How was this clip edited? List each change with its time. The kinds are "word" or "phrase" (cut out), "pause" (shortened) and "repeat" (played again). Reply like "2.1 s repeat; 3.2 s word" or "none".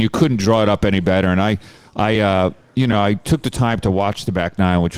none